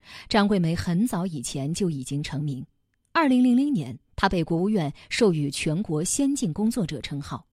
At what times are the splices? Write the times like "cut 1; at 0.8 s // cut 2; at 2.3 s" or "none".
cut 1; at 4.1 s